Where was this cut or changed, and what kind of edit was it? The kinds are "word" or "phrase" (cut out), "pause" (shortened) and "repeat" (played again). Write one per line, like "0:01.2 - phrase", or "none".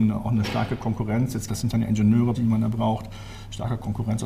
0:01.5 - word
0:02.3 - word